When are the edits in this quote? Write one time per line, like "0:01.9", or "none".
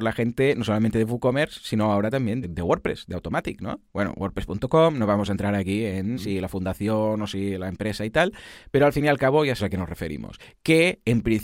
0:02.4
0:06.1
0:09.6